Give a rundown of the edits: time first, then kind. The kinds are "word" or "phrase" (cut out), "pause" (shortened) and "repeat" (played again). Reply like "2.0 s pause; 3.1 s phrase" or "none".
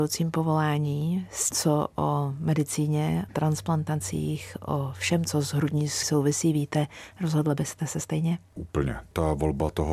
1.5 s word; 3.3 s word; 6.0 s word